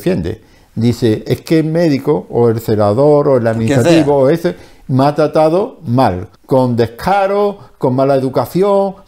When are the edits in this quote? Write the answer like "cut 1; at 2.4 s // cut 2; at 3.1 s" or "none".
cut 1; at 6.4 s